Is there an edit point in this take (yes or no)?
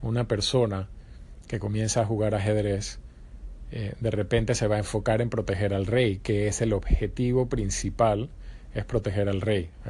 no